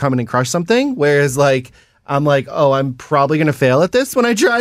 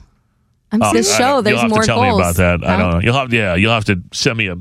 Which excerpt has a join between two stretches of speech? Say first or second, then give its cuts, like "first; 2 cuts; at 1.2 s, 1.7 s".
second; 2 cuts; at 0.9 s, 3.3 s